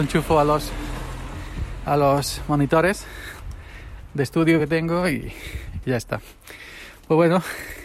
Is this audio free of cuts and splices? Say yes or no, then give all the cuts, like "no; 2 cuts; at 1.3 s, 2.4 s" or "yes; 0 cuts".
yes; 0 cuts